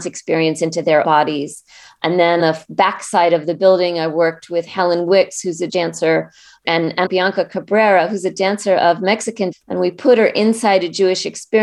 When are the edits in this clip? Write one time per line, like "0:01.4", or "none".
0:01.0
0:02.4
0:05.7
0:06.6
0:07.1
0:09.5